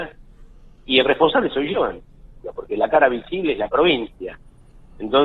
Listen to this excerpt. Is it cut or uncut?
uncut